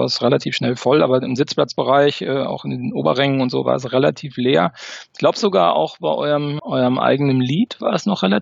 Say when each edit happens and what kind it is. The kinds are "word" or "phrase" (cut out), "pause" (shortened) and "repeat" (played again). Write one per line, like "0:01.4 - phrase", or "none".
0:06.6 - word